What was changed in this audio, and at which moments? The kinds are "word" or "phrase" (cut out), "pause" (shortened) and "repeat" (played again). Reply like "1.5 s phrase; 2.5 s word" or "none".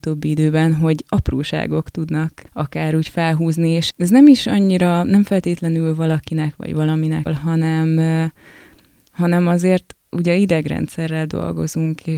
2.5 s pause; 3.9 s word; 7.3 s word